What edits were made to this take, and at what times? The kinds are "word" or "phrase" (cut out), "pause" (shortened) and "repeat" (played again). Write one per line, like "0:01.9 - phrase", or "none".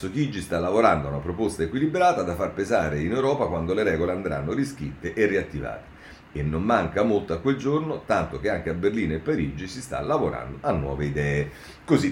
none